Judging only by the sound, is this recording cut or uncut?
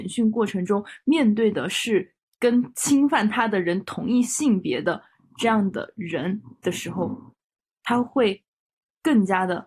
uncut